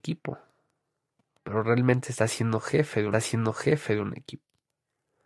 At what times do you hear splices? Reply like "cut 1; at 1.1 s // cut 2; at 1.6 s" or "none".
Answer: cut 1; at 3.1 s